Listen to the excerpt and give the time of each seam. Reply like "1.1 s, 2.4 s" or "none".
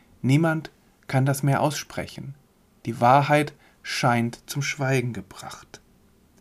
none